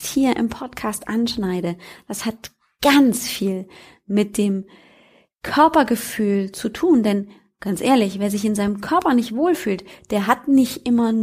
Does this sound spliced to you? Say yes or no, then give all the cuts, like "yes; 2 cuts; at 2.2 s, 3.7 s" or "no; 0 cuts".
no; 0 cuts